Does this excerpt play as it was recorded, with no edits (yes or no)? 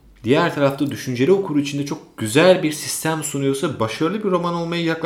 yes